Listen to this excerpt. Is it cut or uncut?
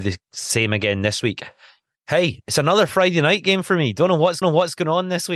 cut